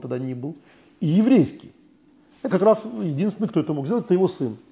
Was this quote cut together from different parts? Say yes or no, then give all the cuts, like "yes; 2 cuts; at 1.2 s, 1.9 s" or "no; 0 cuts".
yes; 1 cut; at 2.5 s